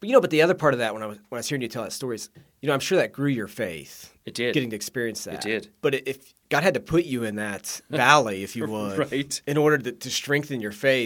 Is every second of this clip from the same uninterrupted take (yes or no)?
yes